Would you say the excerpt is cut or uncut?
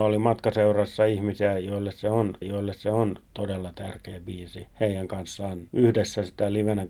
cut